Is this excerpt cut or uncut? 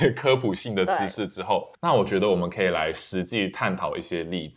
cut